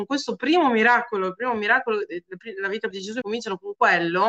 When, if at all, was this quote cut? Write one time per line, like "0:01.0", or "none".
0:02.9
0:03.2